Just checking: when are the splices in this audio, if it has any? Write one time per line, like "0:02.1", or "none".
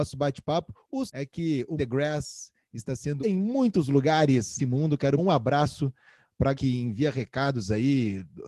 0:01.1
0:01.8
0:03.2
0:04.6
0:05.2
0:06.5